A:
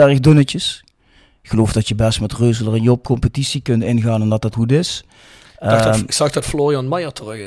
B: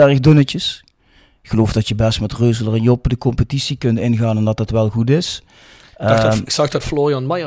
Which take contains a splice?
A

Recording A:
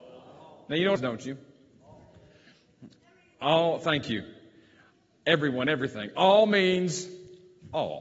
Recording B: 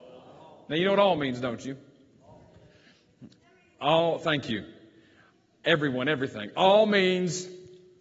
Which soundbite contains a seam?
A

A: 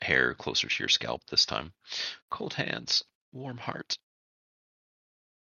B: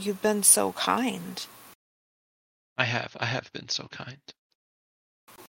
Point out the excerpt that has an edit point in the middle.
A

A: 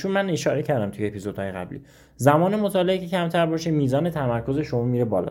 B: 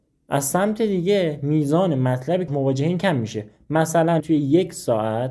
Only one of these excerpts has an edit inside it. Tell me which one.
B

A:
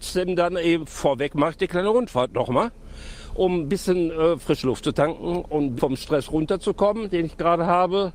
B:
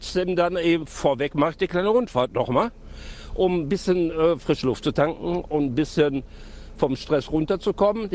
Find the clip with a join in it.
A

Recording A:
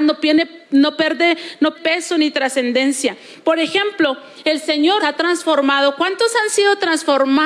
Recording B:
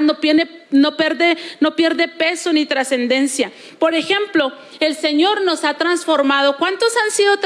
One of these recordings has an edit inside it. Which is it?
A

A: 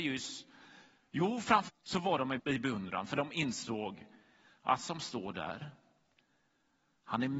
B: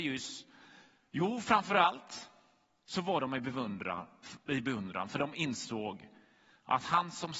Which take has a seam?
A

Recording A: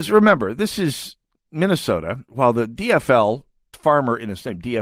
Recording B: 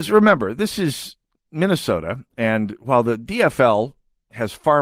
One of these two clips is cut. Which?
A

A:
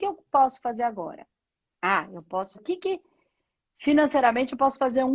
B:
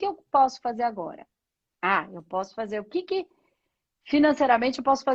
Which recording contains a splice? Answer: A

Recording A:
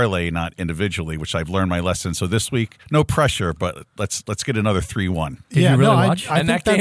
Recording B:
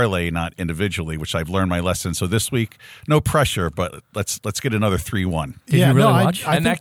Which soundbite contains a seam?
A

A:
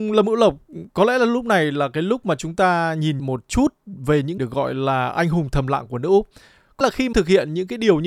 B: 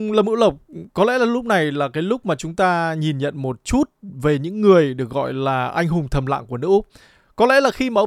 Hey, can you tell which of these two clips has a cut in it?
A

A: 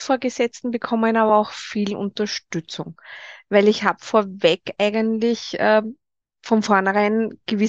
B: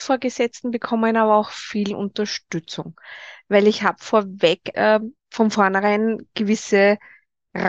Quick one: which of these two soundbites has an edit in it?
B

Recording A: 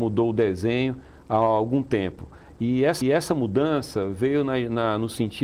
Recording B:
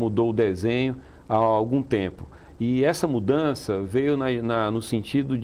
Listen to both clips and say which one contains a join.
A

